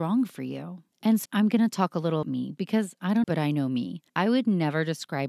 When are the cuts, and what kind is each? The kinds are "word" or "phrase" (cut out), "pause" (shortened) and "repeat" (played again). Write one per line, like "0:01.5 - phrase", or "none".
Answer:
0:00.9 - pause
0:01.3 - word
0:02.2 - word
0:03.2 - phrase
0:04.1 - pause